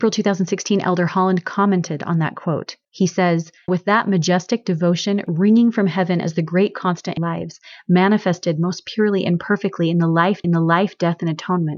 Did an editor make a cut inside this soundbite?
yes; 4 cuts; at 2.8 s, 3.7 s, 7.2 s, 10.4 s

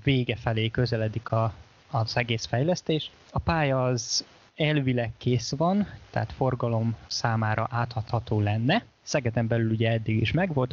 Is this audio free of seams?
yes; 0 cuts

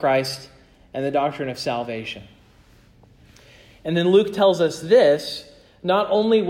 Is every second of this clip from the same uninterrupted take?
yes; 0 cuts

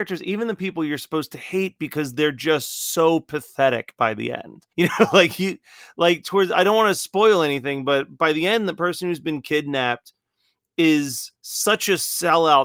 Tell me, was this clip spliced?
yes; 2 cuts; at 4.7 s, 11.4 s

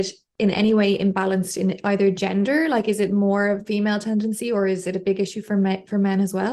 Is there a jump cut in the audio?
no; 0 cuts

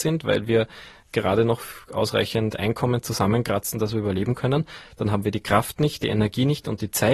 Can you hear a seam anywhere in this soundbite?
no; 0 cuts

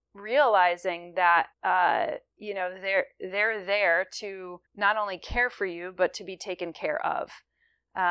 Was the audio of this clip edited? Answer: yes; 2 cuts; at 1.5 s, 4.7 s

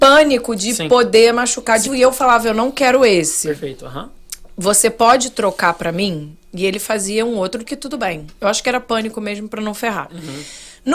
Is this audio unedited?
no; 2 cuts; at 1.8 s, 7.6 s

